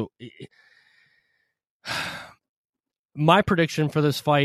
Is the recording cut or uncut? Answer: uncut